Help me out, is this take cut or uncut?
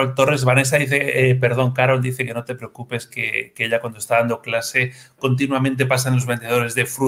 uncut